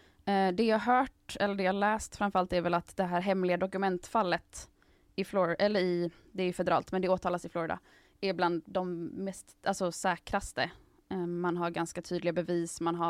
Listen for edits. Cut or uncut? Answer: uncut